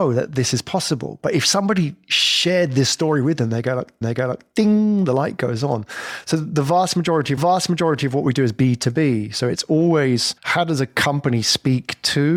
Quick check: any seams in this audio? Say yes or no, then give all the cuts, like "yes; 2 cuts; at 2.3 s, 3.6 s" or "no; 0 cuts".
yes; 3 cuts; at 4.0 s, 7.4 s, 10.4 s